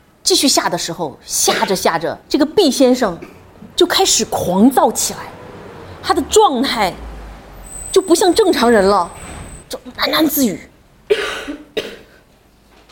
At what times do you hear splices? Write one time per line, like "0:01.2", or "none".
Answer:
0:02.2
0:03.7
0:09.6